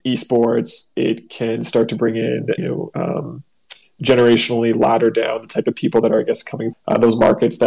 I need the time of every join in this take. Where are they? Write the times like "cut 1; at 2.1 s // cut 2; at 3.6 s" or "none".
cut 1; at 2.6 s // cut 2; at 6.7 s